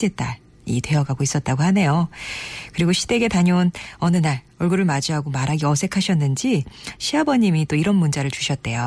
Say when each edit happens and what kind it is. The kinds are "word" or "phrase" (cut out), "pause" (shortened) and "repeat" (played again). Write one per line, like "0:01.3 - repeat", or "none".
none